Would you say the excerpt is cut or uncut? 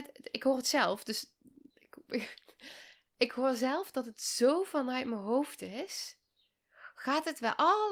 uncut